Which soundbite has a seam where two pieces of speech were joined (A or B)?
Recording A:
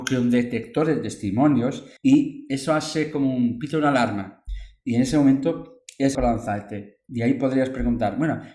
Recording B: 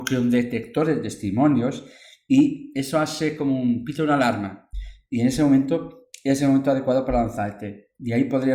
A